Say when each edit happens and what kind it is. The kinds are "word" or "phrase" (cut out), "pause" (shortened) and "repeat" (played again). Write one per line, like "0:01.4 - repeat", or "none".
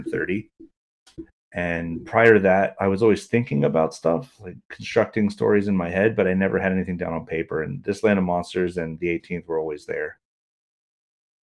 none

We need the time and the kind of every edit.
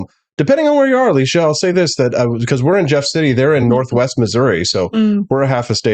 none

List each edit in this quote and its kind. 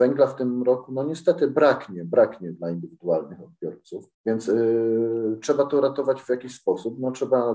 0:04.1 - pause

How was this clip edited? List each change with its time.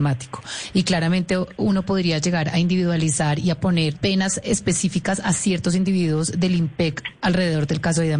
0:03.9 - phrase

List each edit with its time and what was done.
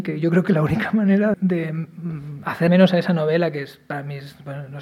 0:01.3 - word
0:02.7 - word

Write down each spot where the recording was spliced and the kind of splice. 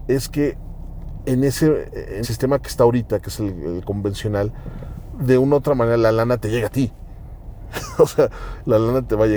0:02.2 - word

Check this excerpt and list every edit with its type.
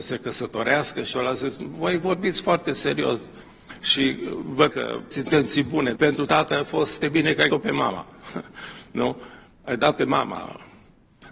0:01.1 - word
0:04.7 - word
0:05.1 - word
0:06.0 - word
0:06.3 - word
0:07.0 - word
0:07.5 - word
0:10.0 - word

